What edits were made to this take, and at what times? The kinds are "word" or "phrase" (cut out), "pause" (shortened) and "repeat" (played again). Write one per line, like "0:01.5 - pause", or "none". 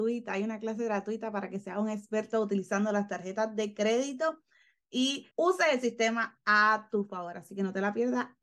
0:05.3 - pause